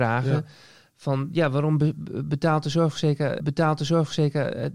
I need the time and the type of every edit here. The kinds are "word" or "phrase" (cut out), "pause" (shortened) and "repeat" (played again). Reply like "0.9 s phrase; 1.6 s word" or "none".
3.4 s repeat